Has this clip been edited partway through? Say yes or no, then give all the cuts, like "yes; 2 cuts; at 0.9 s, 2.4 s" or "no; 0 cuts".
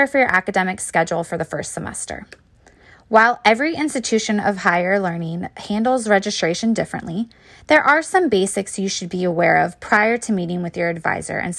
no; 0 cuts